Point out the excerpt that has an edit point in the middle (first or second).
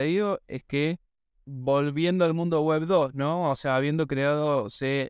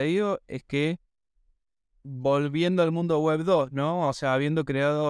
first